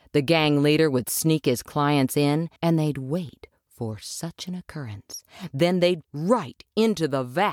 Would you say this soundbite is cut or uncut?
cut